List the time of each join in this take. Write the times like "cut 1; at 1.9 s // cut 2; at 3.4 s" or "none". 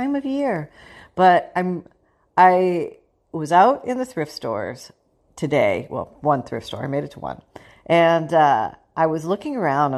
none